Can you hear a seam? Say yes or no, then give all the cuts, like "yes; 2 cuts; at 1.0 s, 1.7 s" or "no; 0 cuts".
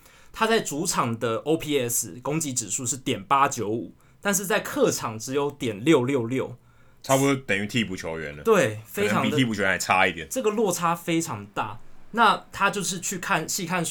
no; 0 cuts